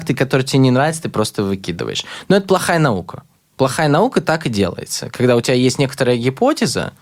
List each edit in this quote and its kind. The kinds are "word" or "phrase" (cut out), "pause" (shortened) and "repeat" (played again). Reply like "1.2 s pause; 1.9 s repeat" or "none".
none